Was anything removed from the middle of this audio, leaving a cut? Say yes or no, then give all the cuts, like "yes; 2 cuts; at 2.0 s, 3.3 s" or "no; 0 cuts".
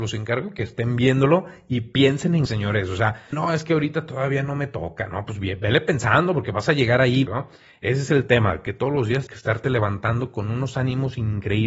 yes; 4 cuts; at 2.5 s, 3.3 s, 7.3 s, 9.3 s